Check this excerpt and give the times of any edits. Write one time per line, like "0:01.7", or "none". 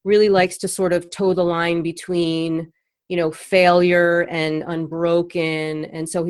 none